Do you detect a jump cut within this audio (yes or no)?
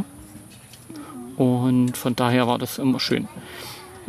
no